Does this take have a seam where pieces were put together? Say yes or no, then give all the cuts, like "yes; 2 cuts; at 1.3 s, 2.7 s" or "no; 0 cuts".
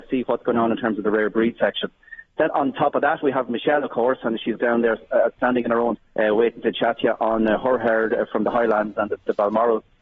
yes; 3 cuts; at 2.5 s, 4.6 s, 6.0 s